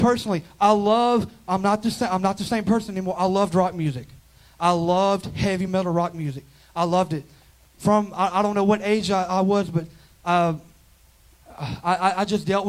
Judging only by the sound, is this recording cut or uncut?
uncut